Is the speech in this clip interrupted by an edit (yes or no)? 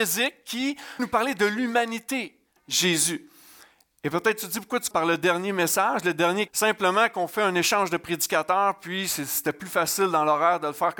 yes